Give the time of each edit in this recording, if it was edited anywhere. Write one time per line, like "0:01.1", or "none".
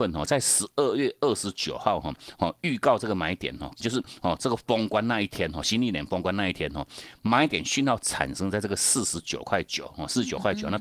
0:03.8